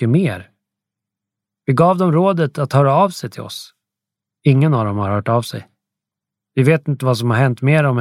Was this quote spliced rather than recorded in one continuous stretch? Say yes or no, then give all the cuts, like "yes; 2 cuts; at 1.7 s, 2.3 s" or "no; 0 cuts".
no; 0 cuts